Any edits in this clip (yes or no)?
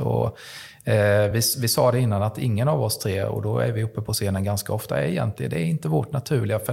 no